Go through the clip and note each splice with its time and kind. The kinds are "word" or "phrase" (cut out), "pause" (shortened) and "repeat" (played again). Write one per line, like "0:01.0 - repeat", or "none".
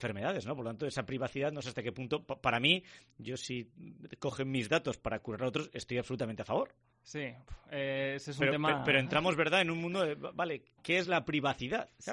none